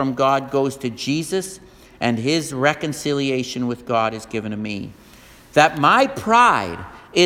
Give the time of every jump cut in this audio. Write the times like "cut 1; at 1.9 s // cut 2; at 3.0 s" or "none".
none